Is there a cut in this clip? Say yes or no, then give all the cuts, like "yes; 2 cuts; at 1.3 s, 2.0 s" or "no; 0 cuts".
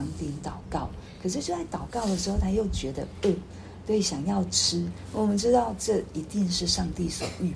no; 0 cuts